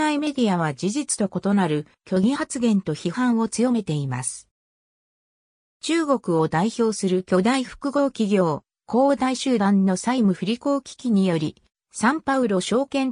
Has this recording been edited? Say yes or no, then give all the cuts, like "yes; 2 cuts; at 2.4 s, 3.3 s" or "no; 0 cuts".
no; 0 cuts